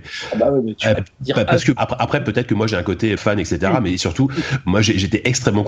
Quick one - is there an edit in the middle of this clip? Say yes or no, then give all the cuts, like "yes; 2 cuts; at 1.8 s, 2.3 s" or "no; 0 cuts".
yes; 3 cuts; at 0.9 s, 1.8 s, 3.2 s